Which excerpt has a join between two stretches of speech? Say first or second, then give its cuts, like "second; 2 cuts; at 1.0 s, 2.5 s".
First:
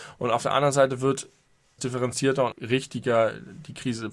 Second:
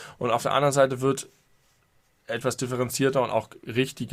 first; 2 cuts; at 1.8 s, 2.5 s